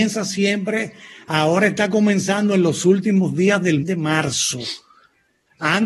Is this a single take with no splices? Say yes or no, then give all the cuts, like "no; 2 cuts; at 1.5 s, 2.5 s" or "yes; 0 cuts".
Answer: no; 1 cut; at 3.8 s